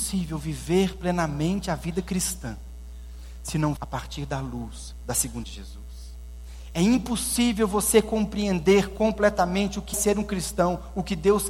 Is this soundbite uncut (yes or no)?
no